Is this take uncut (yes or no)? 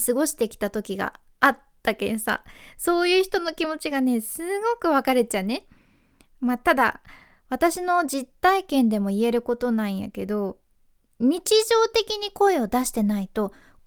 yes